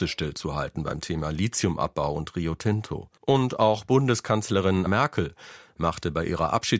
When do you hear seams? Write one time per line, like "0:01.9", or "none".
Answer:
0:03.2
0:04.9